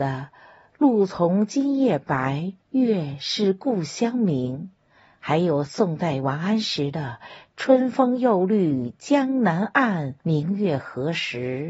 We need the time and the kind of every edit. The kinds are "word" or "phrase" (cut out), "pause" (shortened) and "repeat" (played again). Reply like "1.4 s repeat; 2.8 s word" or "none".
2.6 s pause; 4.8 s pause; 10.2 s pause